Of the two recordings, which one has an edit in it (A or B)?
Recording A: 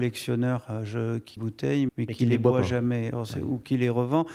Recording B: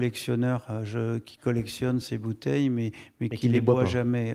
A